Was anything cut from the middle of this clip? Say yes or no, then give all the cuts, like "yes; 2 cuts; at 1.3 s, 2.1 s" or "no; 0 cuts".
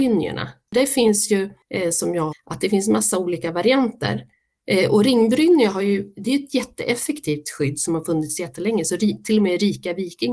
yes; 1 cut; at 2.3 s